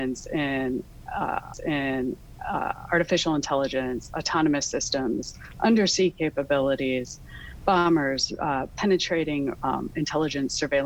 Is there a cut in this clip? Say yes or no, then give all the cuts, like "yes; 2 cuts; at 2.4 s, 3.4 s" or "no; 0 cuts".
yes; 2 cuts; at 1.5 s, 9.5 s